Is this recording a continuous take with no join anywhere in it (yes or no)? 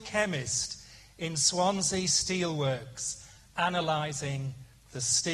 yes